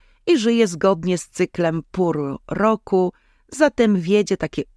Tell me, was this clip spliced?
no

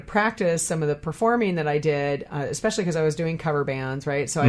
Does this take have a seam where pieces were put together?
no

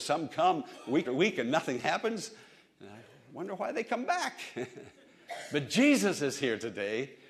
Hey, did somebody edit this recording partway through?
yes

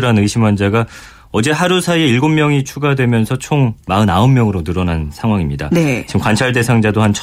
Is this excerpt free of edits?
yes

